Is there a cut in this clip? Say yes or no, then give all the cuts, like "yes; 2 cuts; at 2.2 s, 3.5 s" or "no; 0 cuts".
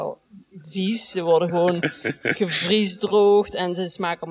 no; 0 cuts